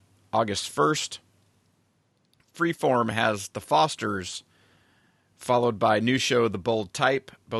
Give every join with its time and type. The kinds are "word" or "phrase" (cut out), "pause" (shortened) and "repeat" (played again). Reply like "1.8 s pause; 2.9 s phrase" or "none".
none